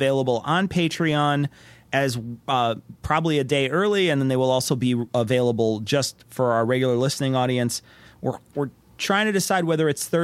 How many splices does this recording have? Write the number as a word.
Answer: zero